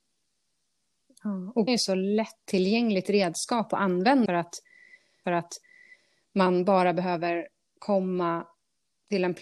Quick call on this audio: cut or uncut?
cut